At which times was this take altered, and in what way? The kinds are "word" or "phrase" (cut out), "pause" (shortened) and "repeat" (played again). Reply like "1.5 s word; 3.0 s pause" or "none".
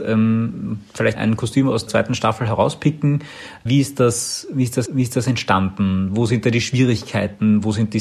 1.1 s word; 1.9 s word; 3.7 s word; 4.9 s repeat